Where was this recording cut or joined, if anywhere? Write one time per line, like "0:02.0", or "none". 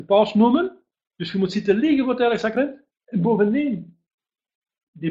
0:02.9